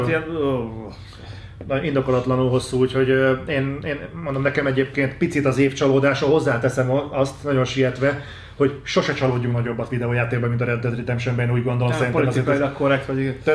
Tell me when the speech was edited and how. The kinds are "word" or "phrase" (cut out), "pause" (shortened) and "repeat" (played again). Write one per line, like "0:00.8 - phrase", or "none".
none